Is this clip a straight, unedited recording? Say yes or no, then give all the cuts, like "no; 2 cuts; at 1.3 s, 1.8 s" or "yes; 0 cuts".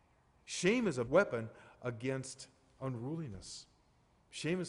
no; 1 cut; at 1.1 s